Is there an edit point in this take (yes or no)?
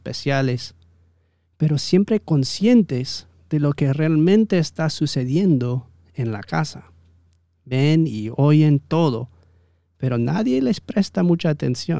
no